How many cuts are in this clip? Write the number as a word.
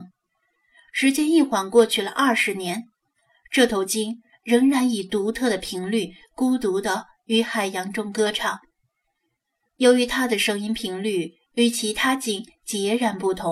zero